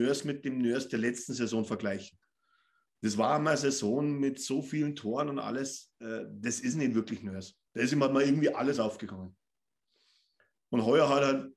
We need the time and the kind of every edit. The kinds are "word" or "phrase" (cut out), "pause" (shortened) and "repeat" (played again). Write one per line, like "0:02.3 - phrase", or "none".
0:07.7 - pause